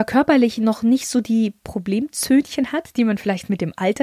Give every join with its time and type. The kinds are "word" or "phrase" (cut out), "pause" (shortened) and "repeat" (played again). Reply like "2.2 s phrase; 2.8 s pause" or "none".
none